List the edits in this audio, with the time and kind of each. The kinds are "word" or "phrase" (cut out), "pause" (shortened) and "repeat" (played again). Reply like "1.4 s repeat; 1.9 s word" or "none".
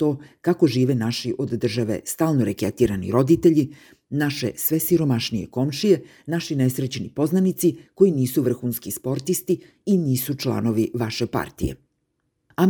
none